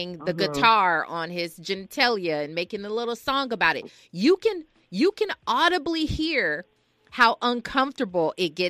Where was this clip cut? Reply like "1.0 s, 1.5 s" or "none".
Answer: none